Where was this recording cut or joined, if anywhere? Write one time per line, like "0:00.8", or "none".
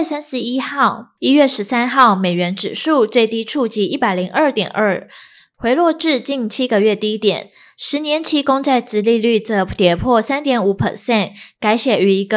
none

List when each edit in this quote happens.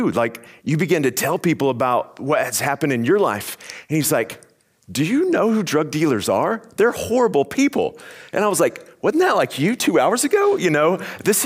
none

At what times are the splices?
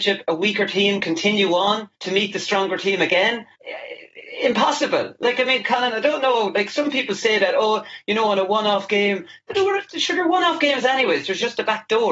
0:01.9
0:03.5

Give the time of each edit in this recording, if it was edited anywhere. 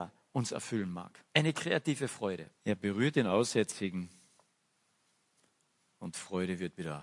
0:01.3
0:02.6

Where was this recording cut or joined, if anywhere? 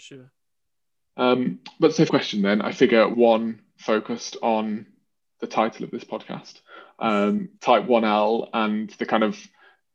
0:02.1
0:03.1
0:07.6

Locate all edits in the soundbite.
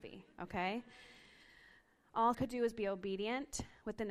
0:02.3

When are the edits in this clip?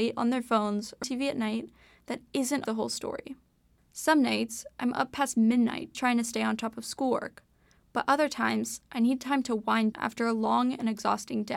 0:01.0
0:02.6
0:05.9
0:09.9

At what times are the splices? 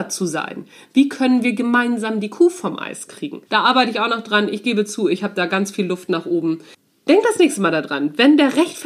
0:03.5
0:06.7

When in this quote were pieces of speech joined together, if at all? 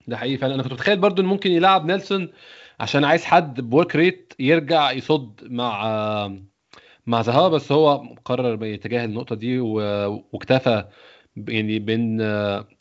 none

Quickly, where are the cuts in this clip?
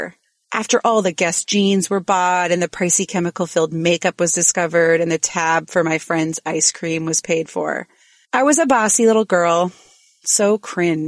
none

